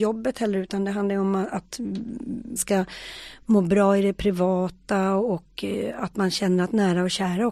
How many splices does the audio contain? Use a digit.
1